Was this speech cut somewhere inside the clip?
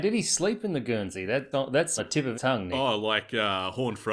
yes; 3 cuts; at 1.5 s, 2.0 s, 2.3 s

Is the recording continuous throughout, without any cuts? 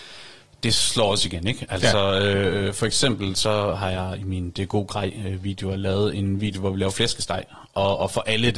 yes; 0 cuts

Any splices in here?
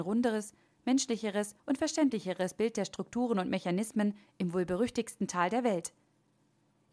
yes; 1 cut; at 1.6 s

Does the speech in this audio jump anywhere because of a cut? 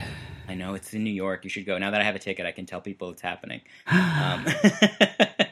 no; 0 cuts

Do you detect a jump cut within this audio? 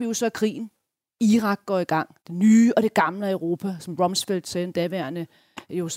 yes; 1 cut; at 2.2 s

